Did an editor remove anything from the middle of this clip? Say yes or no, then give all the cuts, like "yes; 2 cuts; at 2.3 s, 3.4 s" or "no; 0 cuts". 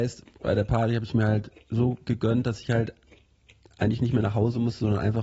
no; 0 cuts